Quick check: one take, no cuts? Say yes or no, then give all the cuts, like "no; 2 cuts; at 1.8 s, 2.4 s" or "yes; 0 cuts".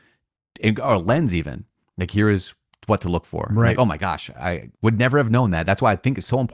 no; 1 cut; at 4.7 s